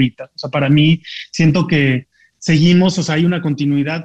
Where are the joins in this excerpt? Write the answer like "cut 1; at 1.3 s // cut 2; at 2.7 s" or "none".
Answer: none